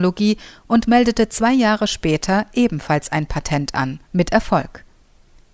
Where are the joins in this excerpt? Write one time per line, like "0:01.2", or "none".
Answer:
0:04.0